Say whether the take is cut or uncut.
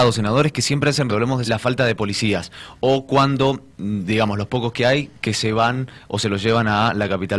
cut